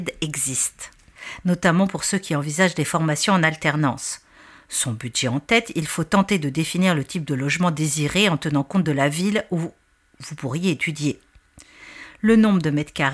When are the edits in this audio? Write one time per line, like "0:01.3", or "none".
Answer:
none